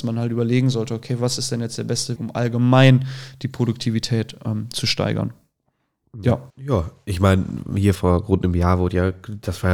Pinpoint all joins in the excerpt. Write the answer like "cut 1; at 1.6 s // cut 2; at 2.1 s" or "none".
cut 1; at 2.2 s // cut 2; at 6.5 s // cut 3; at 8.0 s